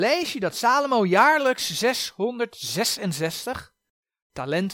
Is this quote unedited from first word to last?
yes; 0 cuts

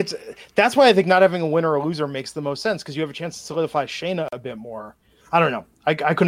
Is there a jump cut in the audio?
no; 0 cuts

